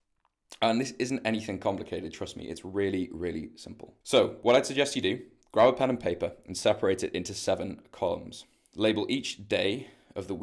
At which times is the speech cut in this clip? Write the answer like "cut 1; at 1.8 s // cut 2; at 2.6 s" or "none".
cut 1; at 4.0 s